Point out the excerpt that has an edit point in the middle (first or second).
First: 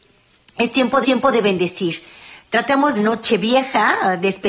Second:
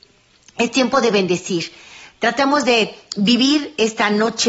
first